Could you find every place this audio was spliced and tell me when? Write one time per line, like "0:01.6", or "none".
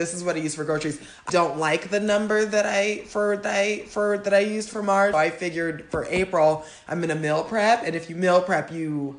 0:01.3
0:03.4
0:04.7
0:05.1